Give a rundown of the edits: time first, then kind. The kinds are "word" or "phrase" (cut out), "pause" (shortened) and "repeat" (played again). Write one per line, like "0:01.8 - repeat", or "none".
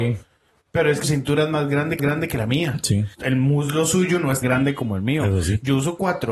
0:01.0 - word
0:02.0 - repeat
0:03.1 - pause
0:04.4 - word